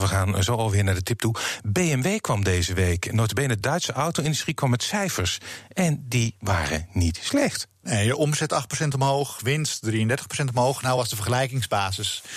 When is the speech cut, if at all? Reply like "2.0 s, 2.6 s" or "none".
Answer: none